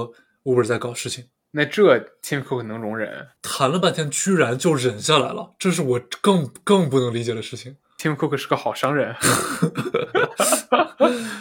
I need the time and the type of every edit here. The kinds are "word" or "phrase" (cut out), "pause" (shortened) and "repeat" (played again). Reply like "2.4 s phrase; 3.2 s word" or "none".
3.4 s pause